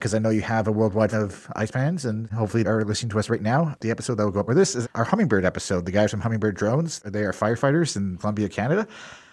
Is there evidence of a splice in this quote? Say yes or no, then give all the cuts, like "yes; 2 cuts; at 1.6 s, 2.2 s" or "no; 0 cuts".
yes; 6 cuts; at 1.1 s, 1.7 s, 2.6 s, 4.5 s, 4.8 s, 8.2 s